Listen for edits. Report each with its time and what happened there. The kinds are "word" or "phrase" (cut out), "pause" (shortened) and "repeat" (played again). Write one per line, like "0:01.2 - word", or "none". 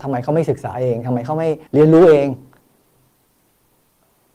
0:01.7 - pause